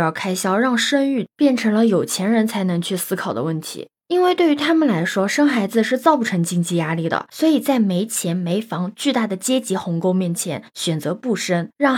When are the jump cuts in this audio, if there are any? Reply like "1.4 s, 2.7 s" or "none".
none